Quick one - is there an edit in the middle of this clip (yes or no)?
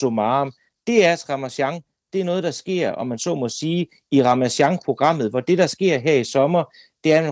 no